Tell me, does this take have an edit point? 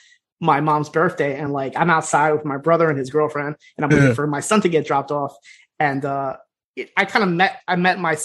no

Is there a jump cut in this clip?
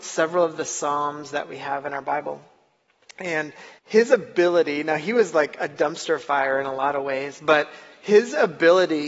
yes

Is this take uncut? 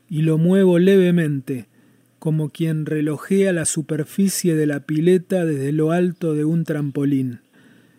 yes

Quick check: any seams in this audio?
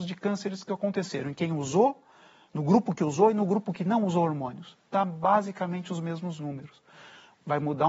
no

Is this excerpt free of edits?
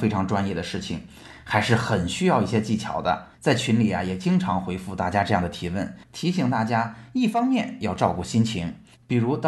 no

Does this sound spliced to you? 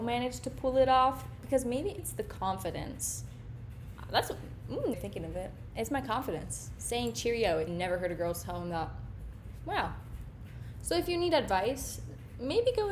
yes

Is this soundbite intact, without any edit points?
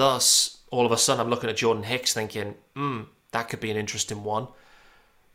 yes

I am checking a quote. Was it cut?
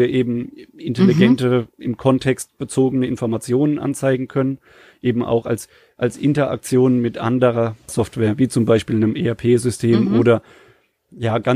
no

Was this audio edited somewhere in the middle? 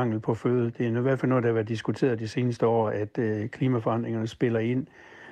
no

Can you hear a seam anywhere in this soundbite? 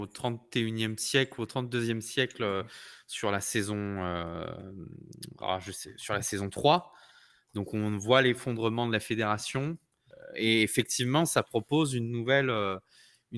no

